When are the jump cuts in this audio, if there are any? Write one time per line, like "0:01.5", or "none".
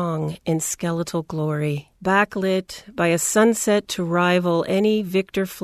0:02.0